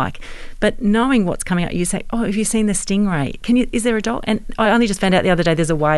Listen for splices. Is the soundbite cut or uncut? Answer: uncut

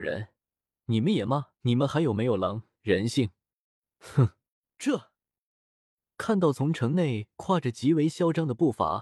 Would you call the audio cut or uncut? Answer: cut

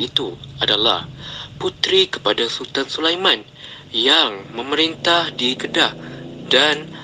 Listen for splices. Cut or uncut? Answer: cut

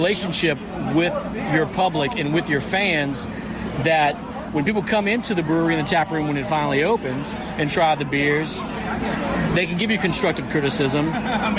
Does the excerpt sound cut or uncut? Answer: uncut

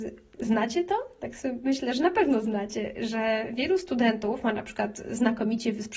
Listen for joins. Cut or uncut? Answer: uncut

